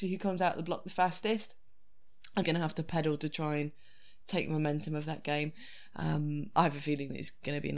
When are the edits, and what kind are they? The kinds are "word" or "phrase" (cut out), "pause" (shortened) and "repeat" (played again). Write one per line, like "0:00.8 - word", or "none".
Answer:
0:02.4 - word